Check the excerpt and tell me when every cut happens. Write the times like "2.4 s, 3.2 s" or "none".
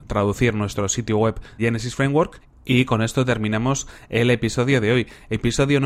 1.6 s